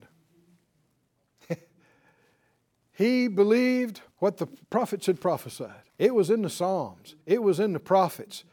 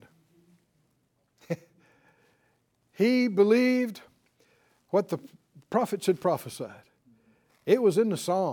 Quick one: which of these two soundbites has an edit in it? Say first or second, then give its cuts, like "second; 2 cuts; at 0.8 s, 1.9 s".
first; 4 cuts; at 4.1 s, 4.6 s, 5.9 s, 7.2 s